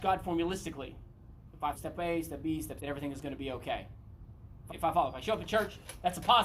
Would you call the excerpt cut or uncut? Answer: cut